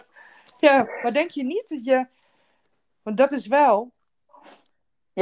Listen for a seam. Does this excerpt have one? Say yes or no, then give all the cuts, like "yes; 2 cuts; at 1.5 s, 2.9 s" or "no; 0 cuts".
no; 0 cuts